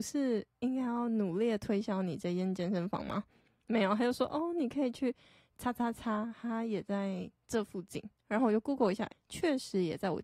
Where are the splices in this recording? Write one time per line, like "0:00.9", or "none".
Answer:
0:09.1